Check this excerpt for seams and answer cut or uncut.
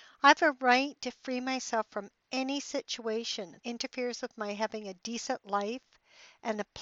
cut